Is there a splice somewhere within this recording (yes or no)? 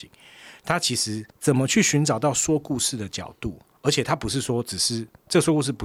yes